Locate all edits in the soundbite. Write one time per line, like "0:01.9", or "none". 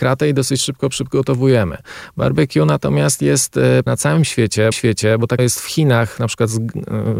0:03.9
0:04.7
0:05.4